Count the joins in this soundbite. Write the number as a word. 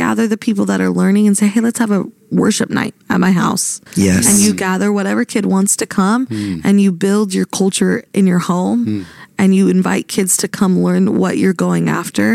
two